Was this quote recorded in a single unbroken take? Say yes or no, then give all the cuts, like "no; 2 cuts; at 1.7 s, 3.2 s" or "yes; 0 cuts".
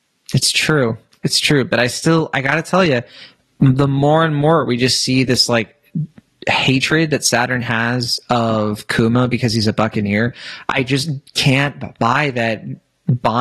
yes; 0 cuts